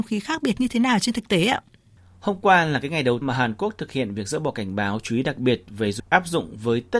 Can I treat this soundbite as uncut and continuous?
no; 2 cuts; at 3.2 s, 6.0 s

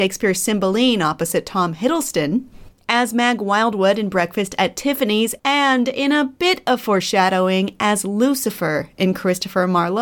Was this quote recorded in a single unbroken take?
yes; 0 cuts

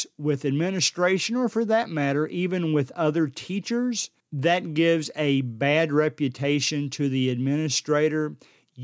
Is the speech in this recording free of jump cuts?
no; 1 cut; at 4.2 s

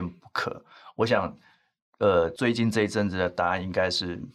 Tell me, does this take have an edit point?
no; 0 cuts

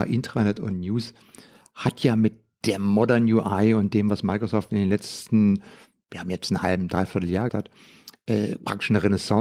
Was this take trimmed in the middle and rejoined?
yes; 1 cut; at 7.5 s

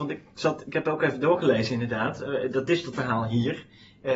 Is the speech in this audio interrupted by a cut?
yes; 1 cut; at 2.9 s

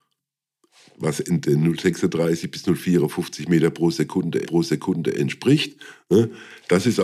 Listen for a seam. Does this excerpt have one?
yes; 1 cut; at 4.4 s

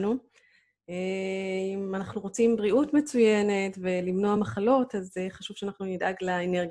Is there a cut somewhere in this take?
no; 0 cuts

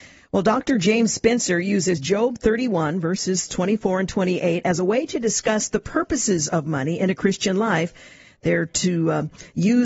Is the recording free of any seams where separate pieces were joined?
yes; 0 cuts

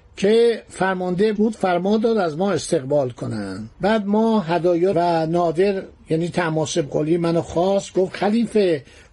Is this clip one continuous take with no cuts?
no; 3 cuts; at 1.4 s, 3.7 s, 4.9 s

